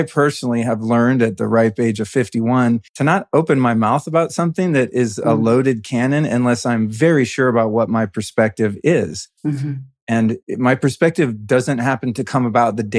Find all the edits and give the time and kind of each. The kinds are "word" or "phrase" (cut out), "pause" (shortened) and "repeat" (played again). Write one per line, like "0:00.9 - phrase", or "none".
0:02.9 - pause
0:09.4 - pause
0:10.4 - pause